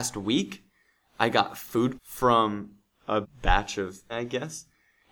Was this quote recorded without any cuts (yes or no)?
no